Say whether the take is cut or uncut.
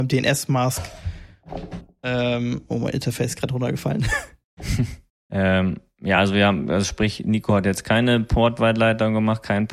uncut